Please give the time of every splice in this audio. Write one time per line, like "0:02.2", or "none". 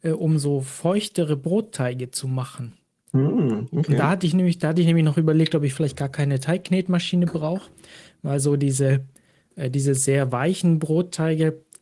none